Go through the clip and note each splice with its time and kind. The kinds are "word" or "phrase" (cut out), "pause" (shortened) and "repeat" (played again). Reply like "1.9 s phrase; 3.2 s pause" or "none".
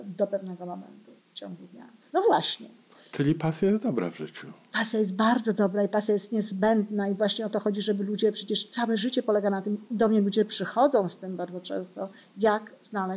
1.2 s pause; 2.1 s pause

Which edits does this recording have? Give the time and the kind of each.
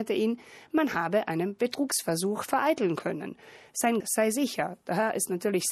4.0 s word

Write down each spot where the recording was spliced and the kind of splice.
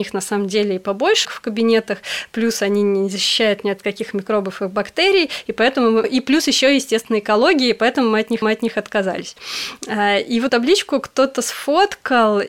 1.2 s phrase; 6.0 s word; 8.4 s repeat; 10.5 s word

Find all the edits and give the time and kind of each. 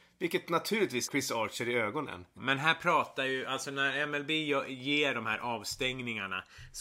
1.1 s word; 2.4 s word

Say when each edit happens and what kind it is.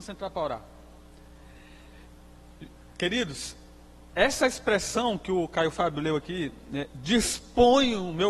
none

